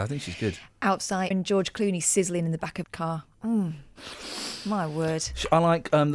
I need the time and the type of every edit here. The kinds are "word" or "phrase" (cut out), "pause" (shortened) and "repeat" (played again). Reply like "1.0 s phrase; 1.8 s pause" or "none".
1.3 s word; 2.8 s word